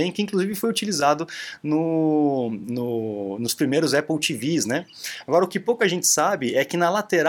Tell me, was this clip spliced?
no; 0 cuts

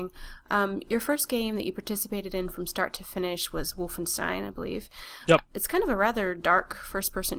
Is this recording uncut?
yes; 0 cuts

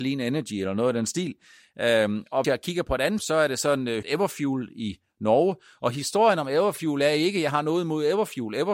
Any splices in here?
yes; 3 cuts; at 2.4 s, 3.2 s, 4.0 s

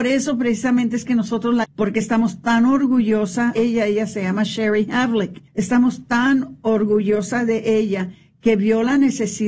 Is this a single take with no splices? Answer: no; 3 cuts; at 1.6 s, 3.6 s, 5.5 s

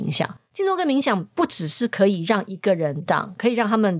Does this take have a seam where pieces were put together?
yes; 1 cut; at 3.1 s

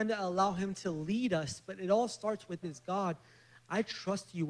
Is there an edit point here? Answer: yes; 1 cut; at 2.6 s

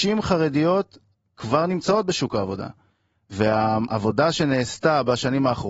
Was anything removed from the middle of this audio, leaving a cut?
no; 0 cuts

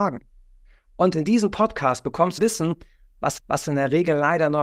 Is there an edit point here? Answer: yes; 2 cuts; at 2.4 s, 3.4 s

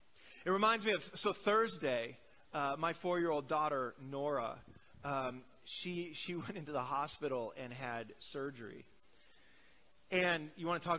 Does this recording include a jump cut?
no; 0 cuts

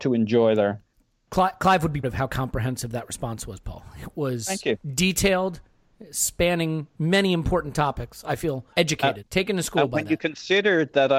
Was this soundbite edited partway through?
yes; 3 cuts; at 2.0 s, 8.7 s, 9.2 s

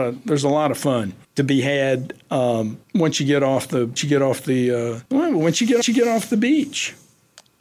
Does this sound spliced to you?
yes; 5 cuts; at 1.2 s, 2.8 s, 4.0 s, 5.0 s, 5.8 s

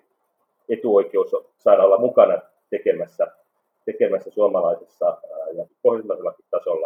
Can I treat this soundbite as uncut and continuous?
no; 1 cut; at 5.7 s

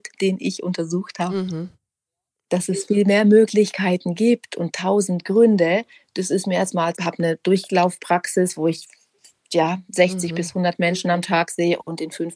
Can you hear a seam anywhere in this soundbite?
yes; 1 cut; at 6.9 s

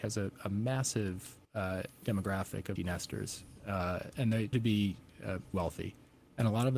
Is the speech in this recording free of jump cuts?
no; 5 cuts; at 1.4 s, 2.8 s, 4.1 s, 4.5 s, 5.5 s

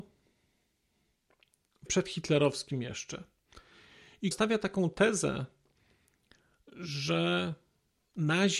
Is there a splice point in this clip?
yes; 2 cuts; at 1.9 s, 4.3 s

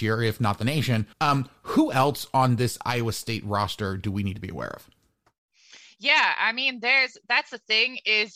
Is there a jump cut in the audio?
yes; 1 cut; at 1.1 s

